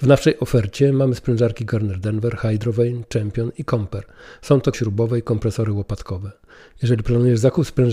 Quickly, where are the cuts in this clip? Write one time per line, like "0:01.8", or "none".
0:04.7